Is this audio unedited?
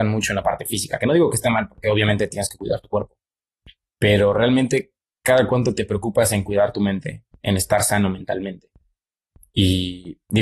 yes; 0 cuts

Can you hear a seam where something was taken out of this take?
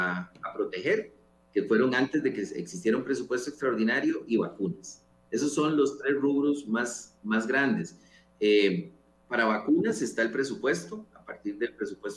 no; 0 cuts

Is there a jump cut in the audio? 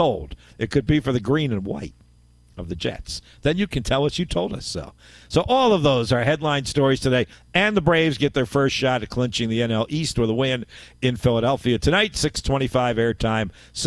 no; 0 cuts

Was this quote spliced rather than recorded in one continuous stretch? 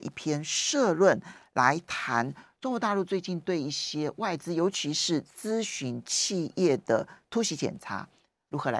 no; 0 cuts

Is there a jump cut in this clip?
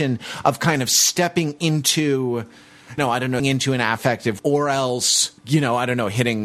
yes; 4 cuts; at 3.0 s, 3.4 s, 4.4 s, 5.4 s

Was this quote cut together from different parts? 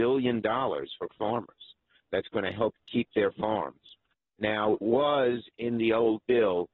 yes; 3 cuts; at 1.1 s, 2.8 s, 4.8 s

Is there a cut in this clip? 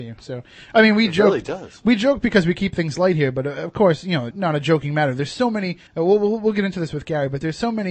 yes; 2 cuts; at 4.3 s, 5.9 s

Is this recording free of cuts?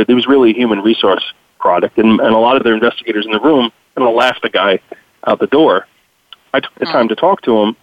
no; 1 cut; at 2.6 s

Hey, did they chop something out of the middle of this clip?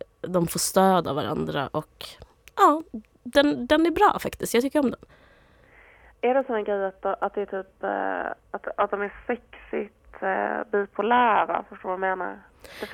no; 0 cuts

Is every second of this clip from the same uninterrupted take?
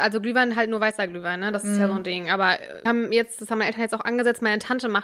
no; 1 cut; at 2.9 s

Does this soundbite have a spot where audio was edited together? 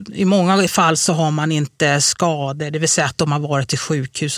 no; 0 cuts

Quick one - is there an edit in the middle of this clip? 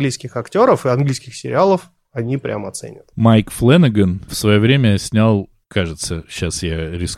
no; 0 cuts

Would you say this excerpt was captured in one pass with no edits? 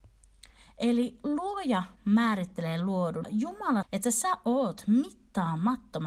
no; 2 cuts; at 3.2 s, 3.8 s

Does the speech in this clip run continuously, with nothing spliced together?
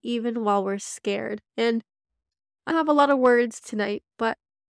no; 3 cuts; at 1.5 s, 2.7 s, 3.6 s

